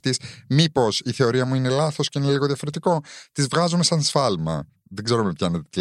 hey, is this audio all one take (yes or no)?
yes